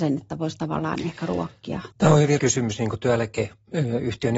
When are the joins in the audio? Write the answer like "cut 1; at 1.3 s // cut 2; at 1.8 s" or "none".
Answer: cut 1; at 1.9 s // cut 2; at 2.4 s